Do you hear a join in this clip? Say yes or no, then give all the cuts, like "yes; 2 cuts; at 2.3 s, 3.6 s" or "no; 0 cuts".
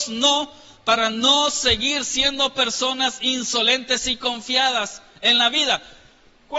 no; 0 cuts